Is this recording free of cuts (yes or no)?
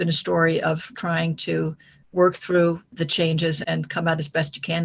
yes